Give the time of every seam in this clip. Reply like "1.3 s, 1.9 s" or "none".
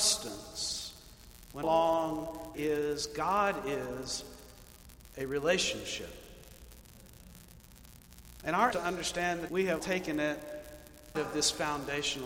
1.6 s, 2.5 s, 8.7 s, 9.5 s, 9.8 s, 11.1 s